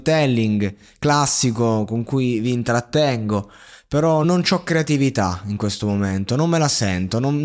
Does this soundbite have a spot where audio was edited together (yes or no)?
yes